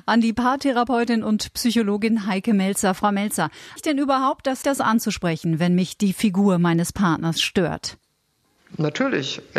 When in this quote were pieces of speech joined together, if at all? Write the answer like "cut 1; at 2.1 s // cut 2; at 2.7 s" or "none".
cut 1; at 3.8 s // cut 2; at 4.6 s